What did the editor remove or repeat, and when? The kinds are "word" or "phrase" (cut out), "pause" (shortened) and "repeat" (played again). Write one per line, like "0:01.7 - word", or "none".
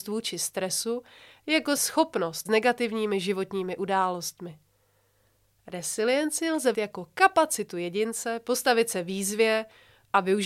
0:01.8 - word
0:02.5 - phrase
0:06.7 - word